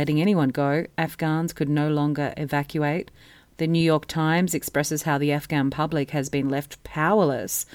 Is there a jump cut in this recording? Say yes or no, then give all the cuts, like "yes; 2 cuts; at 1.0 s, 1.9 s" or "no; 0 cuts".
no; 0 cuts